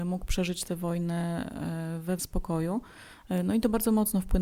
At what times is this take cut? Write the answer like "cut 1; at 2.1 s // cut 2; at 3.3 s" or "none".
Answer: cut 1; at 2.2 s